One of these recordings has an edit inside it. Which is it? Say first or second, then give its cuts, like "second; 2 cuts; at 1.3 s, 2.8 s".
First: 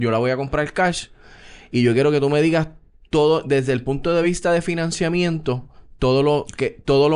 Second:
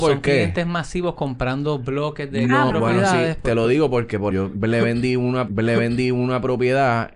second; 3 cuts; at 2.7 s, 4.3 s, 5.5 s